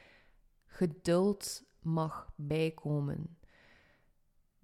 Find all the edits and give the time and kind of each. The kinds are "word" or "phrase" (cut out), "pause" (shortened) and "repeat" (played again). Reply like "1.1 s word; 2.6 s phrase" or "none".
none